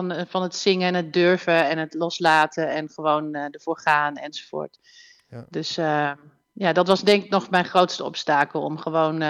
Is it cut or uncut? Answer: uncut